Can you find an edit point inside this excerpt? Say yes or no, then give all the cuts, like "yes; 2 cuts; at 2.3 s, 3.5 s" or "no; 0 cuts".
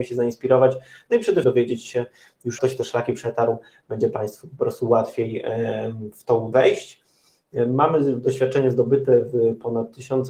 yes; 3 cuts; at 1.4 s, 2.6 s, 6.5 s